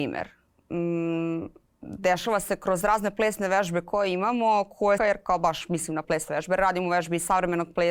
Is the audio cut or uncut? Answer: cut